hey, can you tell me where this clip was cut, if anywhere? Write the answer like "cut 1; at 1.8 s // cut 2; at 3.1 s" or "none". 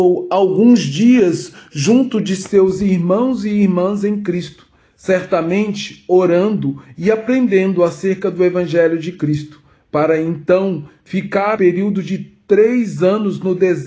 cut 1; at 11.6 s